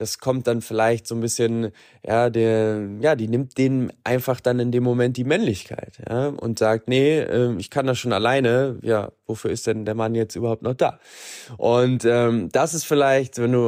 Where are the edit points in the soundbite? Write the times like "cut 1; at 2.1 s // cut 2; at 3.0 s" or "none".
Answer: none